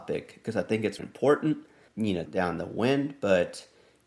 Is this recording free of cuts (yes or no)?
no